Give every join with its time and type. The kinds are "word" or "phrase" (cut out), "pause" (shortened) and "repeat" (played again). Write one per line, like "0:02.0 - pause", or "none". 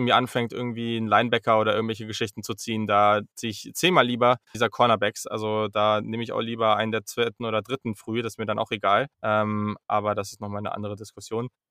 0:04.5 - word
0:09.1 - pause